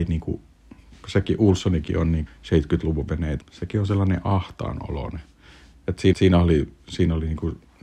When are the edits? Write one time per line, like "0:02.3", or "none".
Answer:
0:02.3
0:03.4
0:06.1